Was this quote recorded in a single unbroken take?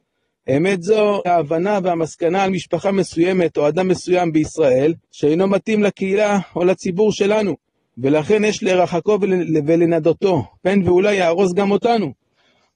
no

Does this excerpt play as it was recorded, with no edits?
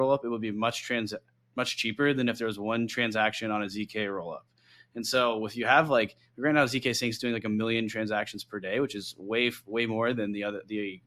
yes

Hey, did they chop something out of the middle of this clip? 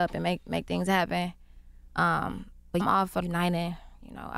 yes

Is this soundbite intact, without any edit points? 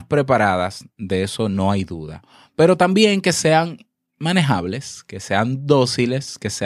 yes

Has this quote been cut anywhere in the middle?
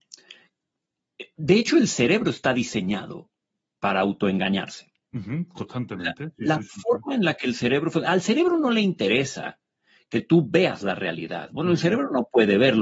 no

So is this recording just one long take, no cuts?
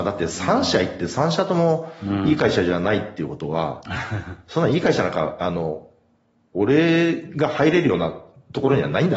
yes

